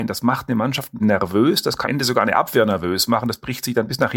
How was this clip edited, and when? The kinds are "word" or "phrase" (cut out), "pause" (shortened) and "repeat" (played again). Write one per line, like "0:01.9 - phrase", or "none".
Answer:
0:01.0 - word
0:01.8 - word

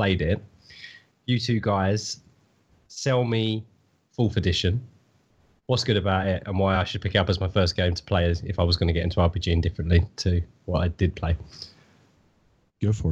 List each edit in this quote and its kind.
none

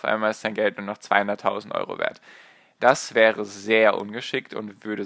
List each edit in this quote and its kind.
none

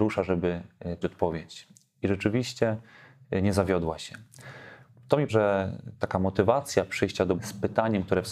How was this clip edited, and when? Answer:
0:01.0 - word
0:05.3 - word
0:07.4 - word

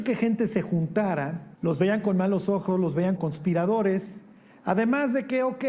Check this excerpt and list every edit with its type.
0:01.5 - pause
0:03.2 - word

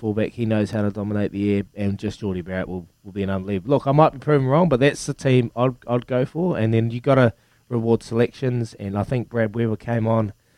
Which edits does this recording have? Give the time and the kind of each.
none

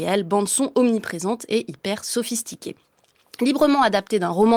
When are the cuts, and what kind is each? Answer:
none

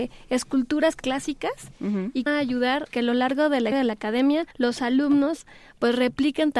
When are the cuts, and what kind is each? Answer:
0:01.0 - word
0:02.3 - phrase
0:02.9 - word
0:03.7 - word
0:04.5 - pause

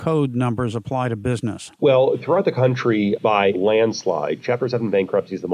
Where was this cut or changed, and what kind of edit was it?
0:01.7 - pause
0:03.5 - word

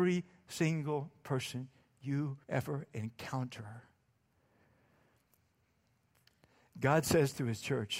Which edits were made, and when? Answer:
0:02.4 - word

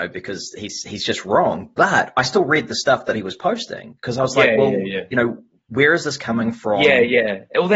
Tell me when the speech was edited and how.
none

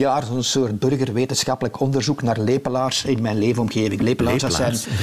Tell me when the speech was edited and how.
none

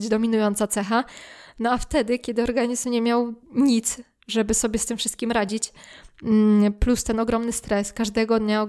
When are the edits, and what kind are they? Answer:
0:03.4 - pause

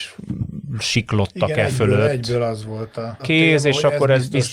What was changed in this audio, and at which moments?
0:03.2 - phrase

